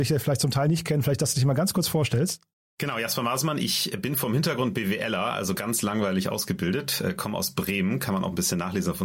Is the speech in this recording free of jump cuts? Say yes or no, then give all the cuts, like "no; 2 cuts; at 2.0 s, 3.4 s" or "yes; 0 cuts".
yes; 0 cuts